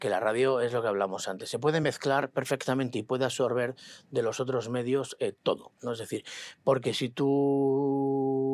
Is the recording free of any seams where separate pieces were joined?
yes; 0 cuts

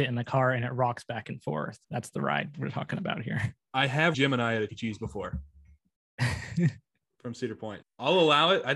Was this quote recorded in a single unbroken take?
no; 4 cuts; at 1.8 s, 4.1 s, 4.7 s, 7.8 s

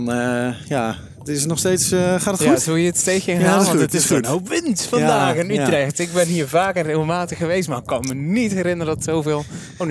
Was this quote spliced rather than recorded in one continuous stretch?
no; 0 cuts

